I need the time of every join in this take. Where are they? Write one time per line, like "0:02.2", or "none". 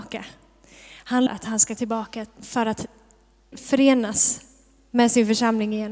0:01.3
0:01.8
0:03.5